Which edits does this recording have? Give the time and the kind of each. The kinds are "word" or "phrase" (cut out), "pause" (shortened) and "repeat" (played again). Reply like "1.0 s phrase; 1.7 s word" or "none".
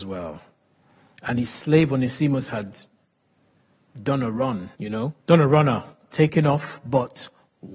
4.7 s pause; 5.2 s pause